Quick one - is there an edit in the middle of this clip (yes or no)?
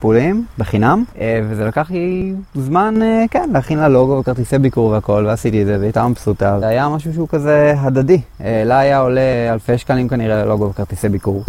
yes